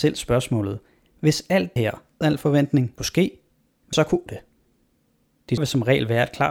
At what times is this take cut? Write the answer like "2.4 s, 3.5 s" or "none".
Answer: 1.8 s, 2.2 s, 3.0 s, 3.9 s, 4.3 s, 5.6 s